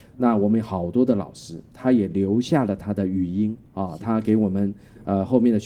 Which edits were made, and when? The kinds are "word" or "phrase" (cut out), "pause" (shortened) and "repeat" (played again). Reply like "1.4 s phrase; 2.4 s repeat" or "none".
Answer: 3.6 s pause